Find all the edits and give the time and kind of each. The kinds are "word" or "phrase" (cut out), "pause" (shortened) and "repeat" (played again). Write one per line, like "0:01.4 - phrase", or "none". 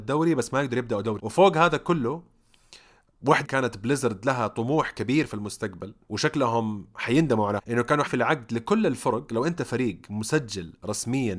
0:01.2 - word
0:03.4 - phrase
0:06.0 - pause
0:07.6 - phrase
0:08.1 - word